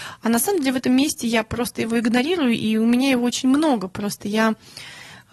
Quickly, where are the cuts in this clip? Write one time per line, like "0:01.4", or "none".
none